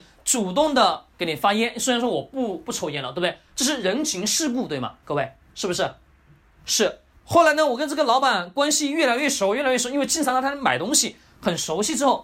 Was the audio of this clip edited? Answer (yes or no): yes